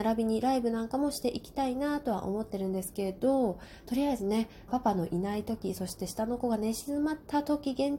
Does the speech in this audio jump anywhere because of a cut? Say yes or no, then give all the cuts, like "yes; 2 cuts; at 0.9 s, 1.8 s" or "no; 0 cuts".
yes; 1 cut; at 4.7 s